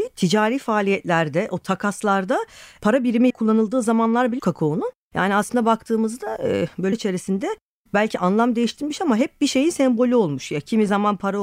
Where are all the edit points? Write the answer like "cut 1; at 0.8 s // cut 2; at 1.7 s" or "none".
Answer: cut 1; at 3.3 s // cut 2; at 4.4 s // cut 3; at 6.9 s

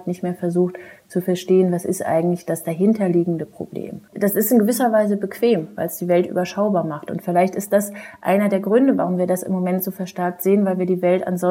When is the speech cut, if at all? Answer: cut 1; at 4.1 s

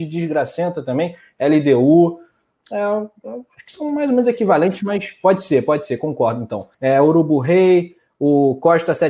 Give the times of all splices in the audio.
cut 1; at 6.7 s

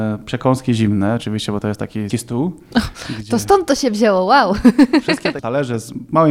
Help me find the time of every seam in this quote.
cut 1; at 2.1 s

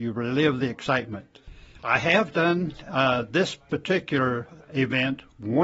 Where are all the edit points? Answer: none

